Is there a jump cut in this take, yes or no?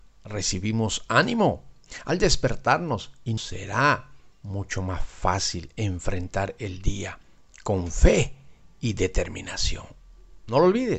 yes